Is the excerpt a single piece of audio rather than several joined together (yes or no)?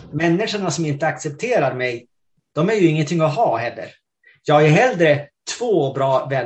yes